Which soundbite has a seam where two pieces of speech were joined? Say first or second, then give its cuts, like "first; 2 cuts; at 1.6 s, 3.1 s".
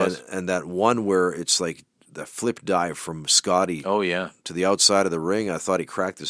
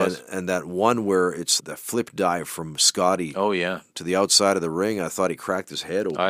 second; 1 cut; at 1.6 s